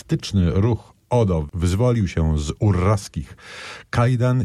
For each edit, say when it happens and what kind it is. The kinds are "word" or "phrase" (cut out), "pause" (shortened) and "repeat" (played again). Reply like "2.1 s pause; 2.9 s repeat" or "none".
none